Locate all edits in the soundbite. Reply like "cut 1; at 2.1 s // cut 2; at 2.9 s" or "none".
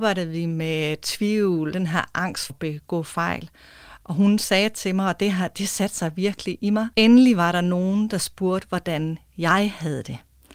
cut 1; at 1.7 s // cut 2; at 2.5 s // cut 3; at 6.9 s